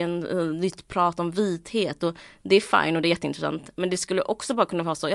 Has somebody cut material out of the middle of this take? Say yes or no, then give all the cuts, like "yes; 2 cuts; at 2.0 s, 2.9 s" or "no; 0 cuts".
no; 0 cuts